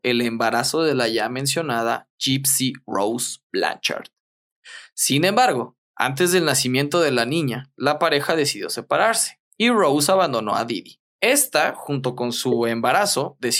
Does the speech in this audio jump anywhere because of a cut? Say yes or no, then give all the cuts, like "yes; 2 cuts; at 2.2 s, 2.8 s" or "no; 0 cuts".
yes; 3 cuts; at 5.8 s, 9.5 s, 11.1 s